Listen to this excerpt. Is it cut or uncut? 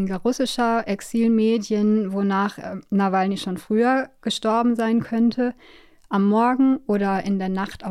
uncut